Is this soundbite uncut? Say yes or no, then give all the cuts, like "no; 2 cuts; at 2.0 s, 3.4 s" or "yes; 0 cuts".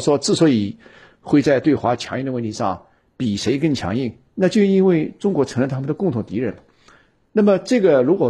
yes; 0 cuts